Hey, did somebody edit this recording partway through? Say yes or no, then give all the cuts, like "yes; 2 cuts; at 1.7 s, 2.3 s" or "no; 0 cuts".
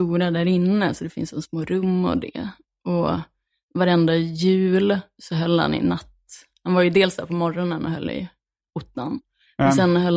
no; 0 cuts